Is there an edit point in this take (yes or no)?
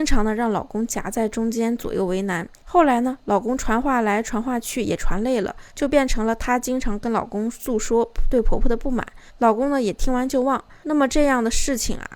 yes